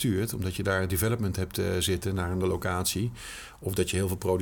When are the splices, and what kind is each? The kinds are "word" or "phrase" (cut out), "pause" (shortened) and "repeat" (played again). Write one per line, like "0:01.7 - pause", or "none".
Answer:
0:02.4 - word

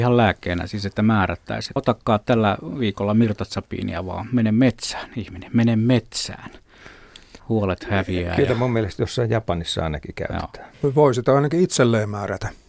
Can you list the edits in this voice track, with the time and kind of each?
0:01.8 - phrase
0:07.4 - pause
0:10.7 - pause

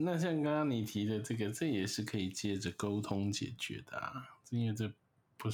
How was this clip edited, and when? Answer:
none

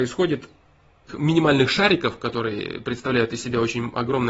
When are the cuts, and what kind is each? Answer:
0:01.1 - word

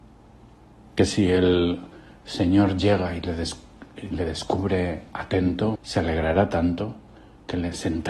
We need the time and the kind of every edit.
0:05.8 - word

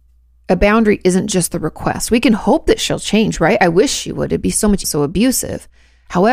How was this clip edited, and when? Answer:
0:04.8 - phrase

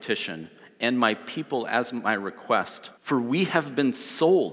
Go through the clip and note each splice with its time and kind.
0:02.9 - pause

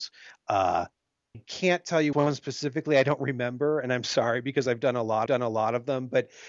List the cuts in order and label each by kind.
0:01.3 - word
0:02.1 - word
0:04.0 - word
0:05.3 - repeat

